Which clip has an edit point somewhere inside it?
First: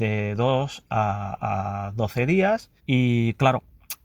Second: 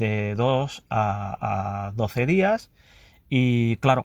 first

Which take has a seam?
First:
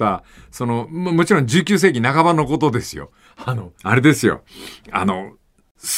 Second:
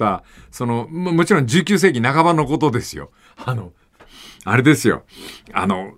first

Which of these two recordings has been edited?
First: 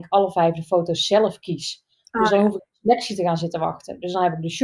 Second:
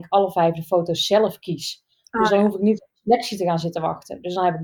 first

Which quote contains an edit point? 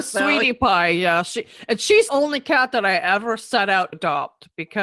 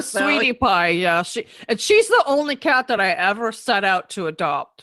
first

